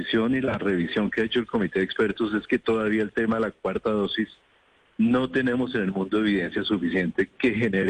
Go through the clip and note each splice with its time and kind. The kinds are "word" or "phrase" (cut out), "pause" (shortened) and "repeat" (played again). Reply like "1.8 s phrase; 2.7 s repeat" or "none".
none